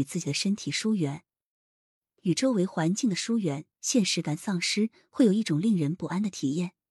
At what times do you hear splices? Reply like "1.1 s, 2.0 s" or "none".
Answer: none

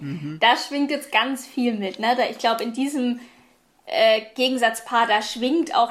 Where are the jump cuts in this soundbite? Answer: none

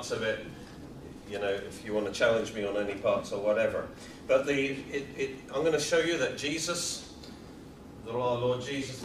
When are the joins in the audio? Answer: none

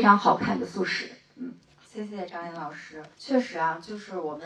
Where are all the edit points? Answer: 1.8 s, 3.1 s

